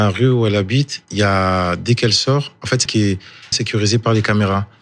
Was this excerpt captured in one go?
no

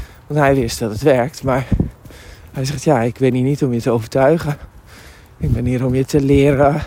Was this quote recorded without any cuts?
yes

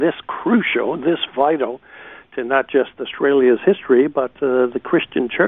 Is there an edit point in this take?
no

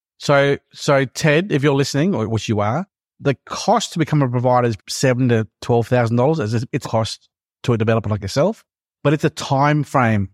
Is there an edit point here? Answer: yes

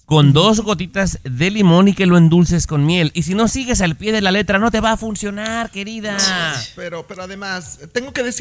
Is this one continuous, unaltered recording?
yes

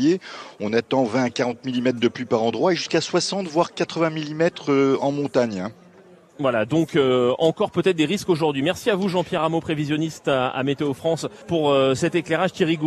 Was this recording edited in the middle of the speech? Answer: yes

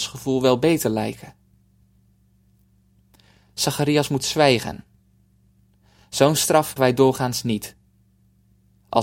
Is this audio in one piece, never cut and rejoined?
no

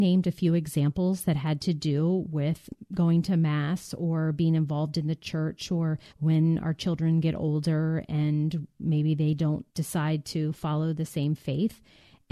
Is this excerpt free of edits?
no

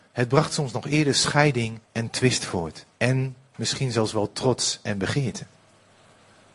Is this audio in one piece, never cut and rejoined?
no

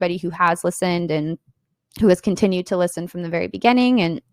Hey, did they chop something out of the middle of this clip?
no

